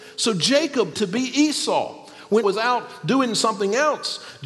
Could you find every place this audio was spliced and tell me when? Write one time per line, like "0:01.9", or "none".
0:00.9
0:02.4